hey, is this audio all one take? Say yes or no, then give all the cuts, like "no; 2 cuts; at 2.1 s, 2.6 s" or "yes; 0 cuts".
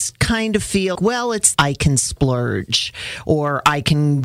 no; 2 cuts; at 1.0 s, 1.5 s